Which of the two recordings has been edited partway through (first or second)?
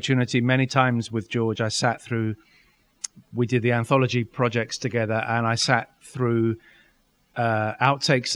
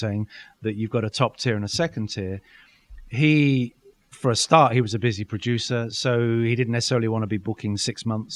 second